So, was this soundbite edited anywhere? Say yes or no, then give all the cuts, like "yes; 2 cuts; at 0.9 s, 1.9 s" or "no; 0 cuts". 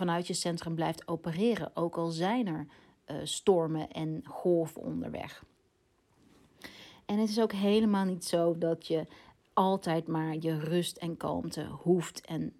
no; 0 cuts